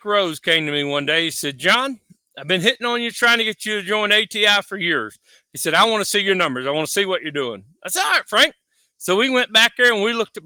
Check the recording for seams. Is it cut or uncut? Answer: uncut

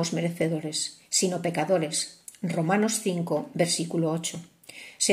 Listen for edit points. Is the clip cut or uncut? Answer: uncut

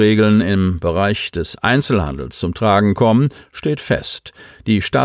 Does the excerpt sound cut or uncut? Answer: uncut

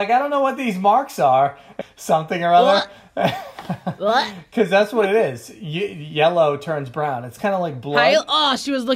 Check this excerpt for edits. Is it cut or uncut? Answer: cut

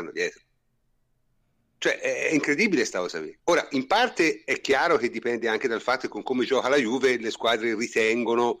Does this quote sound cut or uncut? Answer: cut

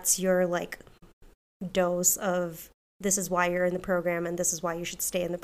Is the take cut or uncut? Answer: cut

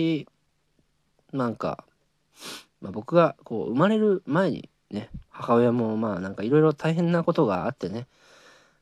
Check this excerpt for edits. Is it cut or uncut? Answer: cut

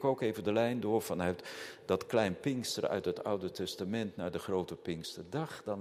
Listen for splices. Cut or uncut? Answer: uncut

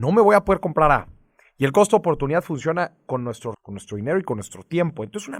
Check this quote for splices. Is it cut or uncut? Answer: cut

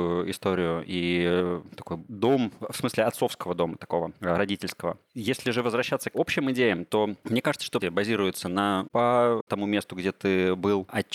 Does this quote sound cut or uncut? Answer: cut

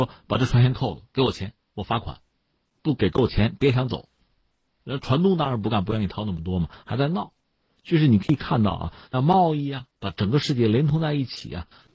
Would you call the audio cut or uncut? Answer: cut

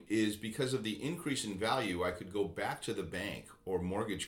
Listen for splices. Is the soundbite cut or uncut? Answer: uncut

